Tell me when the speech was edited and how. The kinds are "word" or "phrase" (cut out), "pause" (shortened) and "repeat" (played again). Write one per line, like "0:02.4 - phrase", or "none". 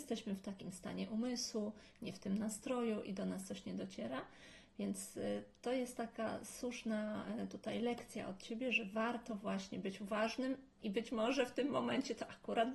none